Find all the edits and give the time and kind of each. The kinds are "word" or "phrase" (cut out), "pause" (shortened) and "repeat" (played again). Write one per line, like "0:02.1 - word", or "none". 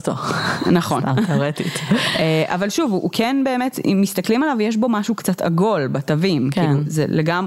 none